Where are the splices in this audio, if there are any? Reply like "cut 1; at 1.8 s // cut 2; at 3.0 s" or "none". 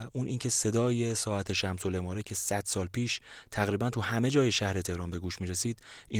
none